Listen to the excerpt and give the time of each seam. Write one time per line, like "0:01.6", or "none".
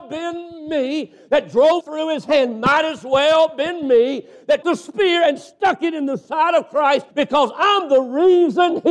0:01.8
0:04.6
0:07.1